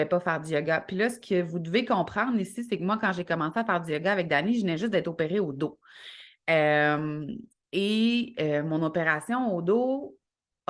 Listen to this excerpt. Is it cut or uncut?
uncut